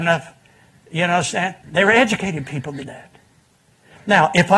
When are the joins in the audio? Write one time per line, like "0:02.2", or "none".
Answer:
0:01.6
0:02.8

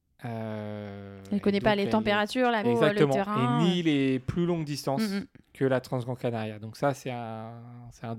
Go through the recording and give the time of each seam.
0:02.6

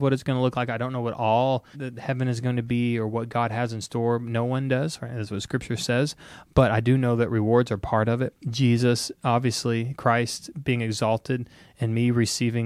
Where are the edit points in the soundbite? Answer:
0:01.7

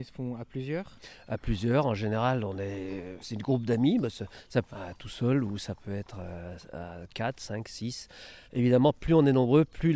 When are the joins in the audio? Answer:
0:03.2
0:04.7
0:08.4

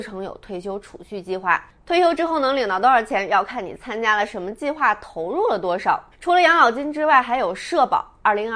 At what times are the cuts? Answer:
0:06.1

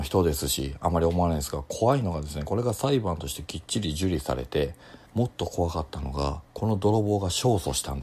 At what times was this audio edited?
0:05.1
0:06.4

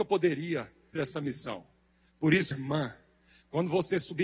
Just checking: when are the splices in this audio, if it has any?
0:00.9
0:02.5

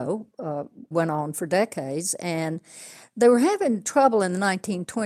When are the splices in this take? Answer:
0:00.9

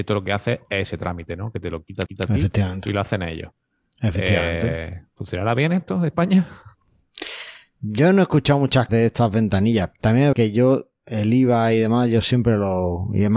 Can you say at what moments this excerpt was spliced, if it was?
0:02.1
0:05.1
0:08.9
0:10.3

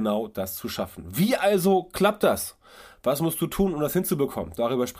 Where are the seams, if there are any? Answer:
none

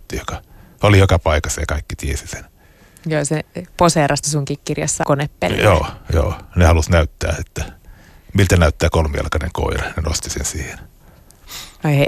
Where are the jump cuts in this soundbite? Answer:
0:04.2
0:05.0

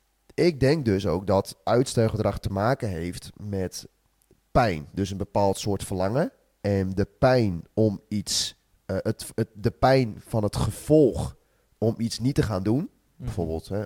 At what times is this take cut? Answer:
none

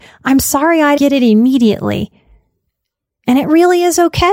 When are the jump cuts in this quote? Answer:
0:01.0

